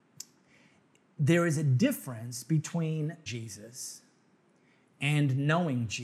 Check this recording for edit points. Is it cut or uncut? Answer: cut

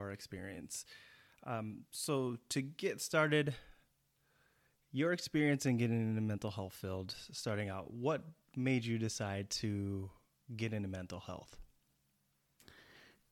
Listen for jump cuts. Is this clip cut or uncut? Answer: uncut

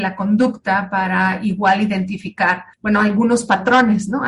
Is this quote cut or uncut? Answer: cut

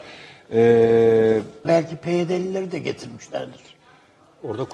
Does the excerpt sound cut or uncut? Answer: cut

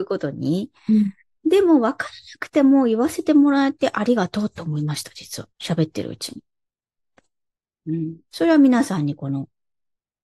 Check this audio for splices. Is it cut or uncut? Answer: cut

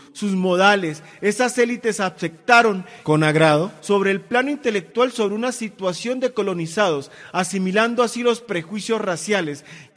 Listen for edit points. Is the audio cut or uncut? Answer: uncut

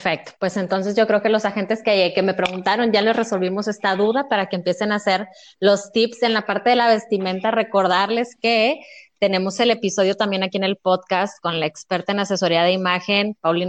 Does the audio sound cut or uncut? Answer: uncut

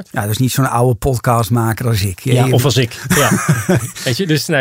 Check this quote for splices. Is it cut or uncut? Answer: uncut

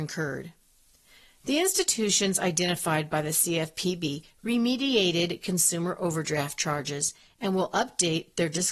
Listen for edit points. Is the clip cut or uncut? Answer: uncut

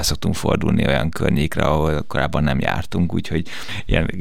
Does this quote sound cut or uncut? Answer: uncut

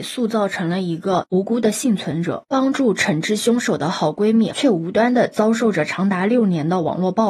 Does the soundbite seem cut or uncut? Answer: cut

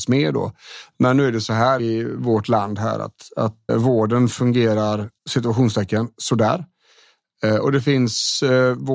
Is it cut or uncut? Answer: cut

